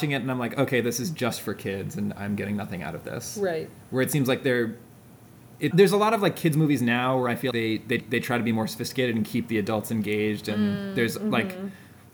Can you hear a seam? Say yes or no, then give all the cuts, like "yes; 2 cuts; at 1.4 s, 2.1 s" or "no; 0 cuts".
yes; 3 cuts; at 5.7 s, 7.5 s, 8.0 s